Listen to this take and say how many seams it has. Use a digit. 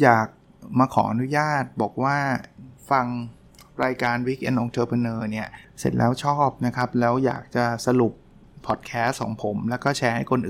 1